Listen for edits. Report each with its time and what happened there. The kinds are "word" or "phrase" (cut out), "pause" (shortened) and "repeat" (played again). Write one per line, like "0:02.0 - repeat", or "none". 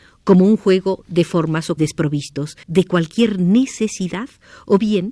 0:01.8 - word
0:02.6 - pause